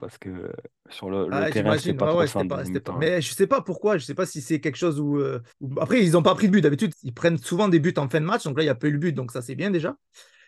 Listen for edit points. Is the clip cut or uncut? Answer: cut